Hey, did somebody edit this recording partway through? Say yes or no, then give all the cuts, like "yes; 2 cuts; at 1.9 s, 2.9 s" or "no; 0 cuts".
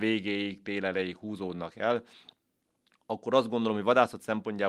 no; 0 cuts